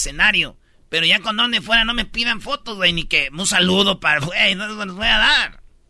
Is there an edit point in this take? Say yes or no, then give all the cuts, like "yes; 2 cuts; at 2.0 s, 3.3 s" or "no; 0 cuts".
no; 0 cuts